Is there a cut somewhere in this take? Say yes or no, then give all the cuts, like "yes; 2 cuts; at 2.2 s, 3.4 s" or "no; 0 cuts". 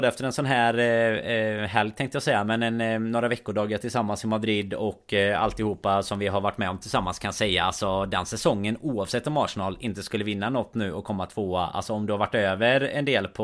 no; 0 cuts